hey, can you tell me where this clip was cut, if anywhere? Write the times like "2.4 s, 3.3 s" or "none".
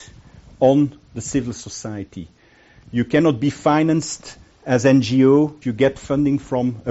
5.6 s